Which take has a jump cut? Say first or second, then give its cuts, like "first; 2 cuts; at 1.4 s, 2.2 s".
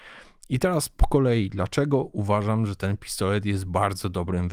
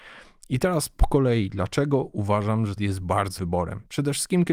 second; 2 cuts; at 2.8 s, 3.4 s